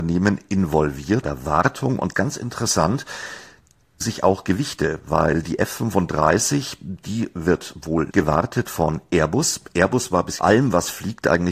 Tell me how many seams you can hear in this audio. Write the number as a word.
five